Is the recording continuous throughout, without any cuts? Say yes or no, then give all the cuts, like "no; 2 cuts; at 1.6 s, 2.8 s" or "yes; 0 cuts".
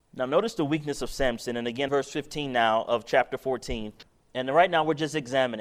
no; 2 cuts; at 1.9 s, 4.0 s